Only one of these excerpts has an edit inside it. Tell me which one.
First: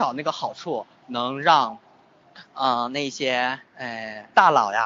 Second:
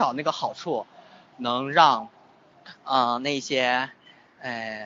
first; 2 cuts; at 0.9 s, 3.7 s

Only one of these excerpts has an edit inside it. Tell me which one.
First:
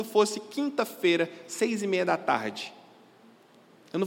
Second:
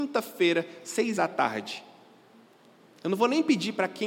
second; 1 cut; at 1.2 s

